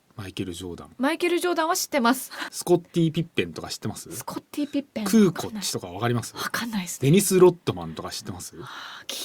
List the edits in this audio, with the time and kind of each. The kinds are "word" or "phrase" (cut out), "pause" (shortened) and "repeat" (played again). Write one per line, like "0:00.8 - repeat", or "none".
0:02.5 - word